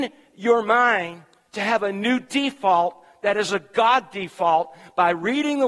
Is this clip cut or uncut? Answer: uncut